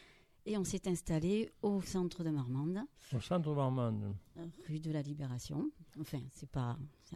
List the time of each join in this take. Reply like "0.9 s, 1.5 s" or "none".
none